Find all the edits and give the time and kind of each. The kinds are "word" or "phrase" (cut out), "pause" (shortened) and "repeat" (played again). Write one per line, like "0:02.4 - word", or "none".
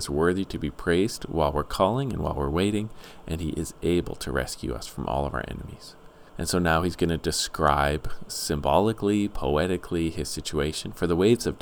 0:06.3 - pause
0:08.3 - word